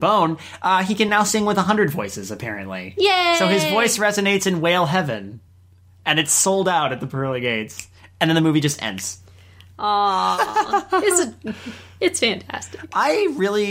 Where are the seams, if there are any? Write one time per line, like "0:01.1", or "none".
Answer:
none